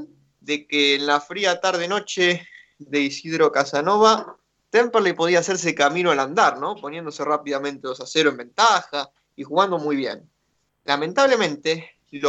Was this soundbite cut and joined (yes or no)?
no